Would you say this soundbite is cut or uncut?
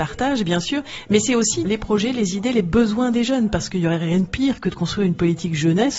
cut